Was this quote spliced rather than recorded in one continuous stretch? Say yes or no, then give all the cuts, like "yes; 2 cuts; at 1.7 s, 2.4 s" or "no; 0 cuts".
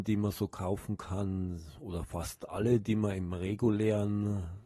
no; 0 cuts